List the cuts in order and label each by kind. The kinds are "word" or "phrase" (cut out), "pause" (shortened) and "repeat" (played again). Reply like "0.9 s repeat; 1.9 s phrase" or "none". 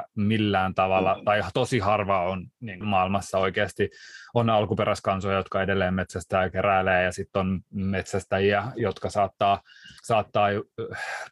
2.8 s word; 10.0 s pause